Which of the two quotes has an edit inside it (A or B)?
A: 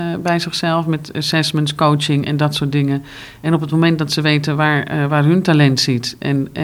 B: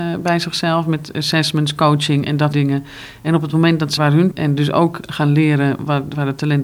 B